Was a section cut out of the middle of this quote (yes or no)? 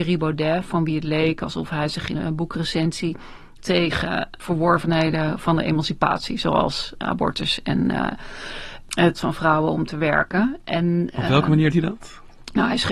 yes